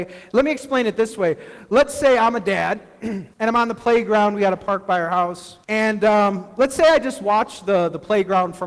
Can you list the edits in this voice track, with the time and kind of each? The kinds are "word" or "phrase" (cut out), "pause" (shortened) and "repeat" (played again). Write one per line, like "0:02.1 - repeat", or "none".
0:03.3 - pause
0:05.6 - pause

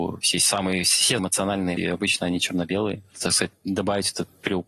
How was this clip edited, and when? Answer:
0:01.2 - word
0:01.8 - word
0:03.1 - word

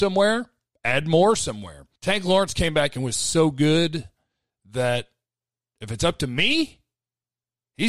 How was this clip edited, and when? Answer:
0:02.0 - pause

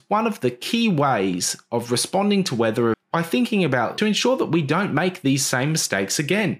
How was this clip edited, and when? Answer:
0:02.9 - word
0:04.0 - phrase

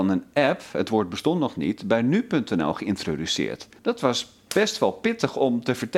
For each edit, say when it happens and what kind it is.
0:03.8 - pause

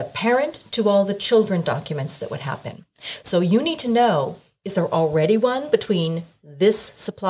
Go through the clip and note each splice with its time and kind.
none

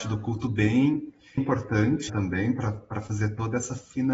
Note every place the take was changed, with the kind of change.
0:01.4 - word
0:02.1 - word

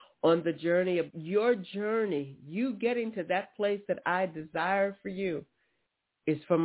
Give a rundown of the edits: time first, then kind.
0:01.1 - phrase

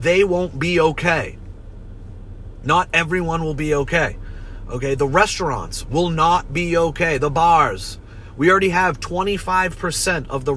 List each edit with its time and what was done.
none

